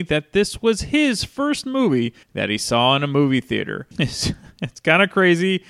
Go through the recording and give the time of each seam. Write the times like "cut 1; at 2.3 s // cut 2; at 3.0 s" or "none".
cut 1; at 2.2 s // cut 2; at 3.9 s